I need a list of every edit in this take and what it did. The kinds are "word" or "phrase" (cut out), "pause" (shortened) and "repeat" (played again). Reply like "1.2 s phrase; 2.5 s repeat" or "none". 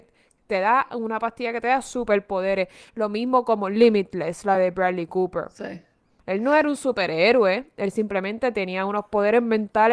none

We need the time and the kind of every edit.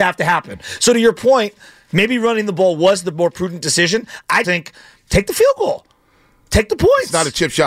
4.4 s word

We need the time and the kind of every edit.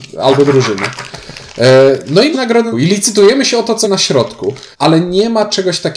2.3 s phrase; 2.7 s phrase; 3.8 s word; 4.7 s pause

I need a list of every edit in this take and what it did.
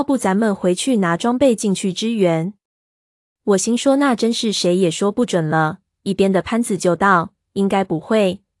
none

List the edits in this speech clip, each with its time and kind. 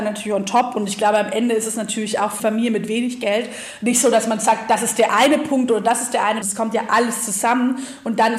2.4 s word; 6.4 s phrase

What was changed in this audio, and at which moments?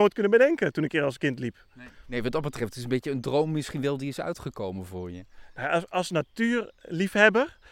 none

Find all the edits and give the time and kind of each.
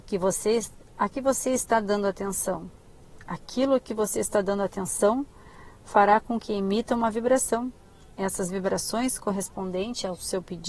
none

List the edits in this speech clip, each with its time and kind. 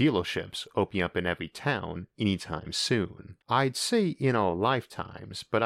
3.4 s pause

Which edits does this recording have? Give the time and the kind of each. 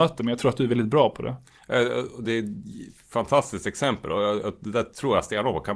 none

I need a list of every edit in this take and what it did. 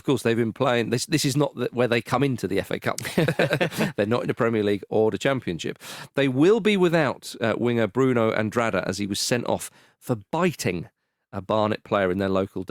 none

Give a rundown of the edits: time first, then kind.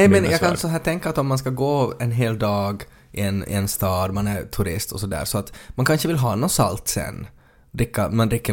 none

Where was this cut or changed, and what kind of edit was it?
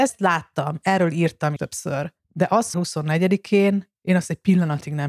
1.6 s word; 2.2 s pause; 2.7 s phrase

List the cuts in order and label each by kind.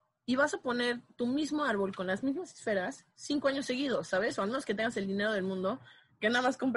none

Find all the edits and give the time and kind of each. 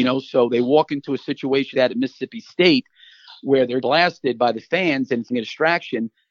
1.7 s word; 3.8 s word; 5.3 s word

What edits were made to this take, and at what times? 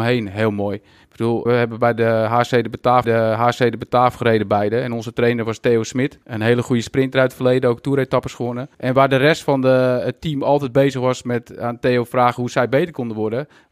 1.5 s word; 3.0 s repeat; 6.2 s pause; 8.7 s pause

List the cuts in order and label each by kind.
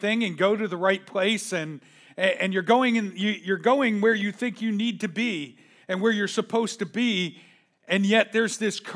none

